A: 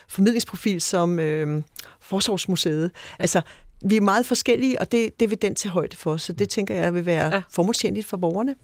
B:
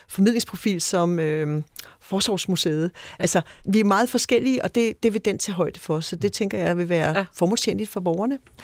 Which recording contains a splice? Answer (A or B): B